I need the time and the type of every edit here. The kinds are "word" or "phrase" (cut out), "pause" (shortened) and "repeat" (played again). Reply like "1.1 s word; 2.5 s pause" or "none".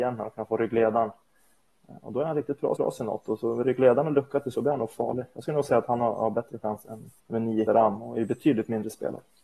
2.8 s repeat; 4.5 s word; 7.2 s pause; 7.7 s word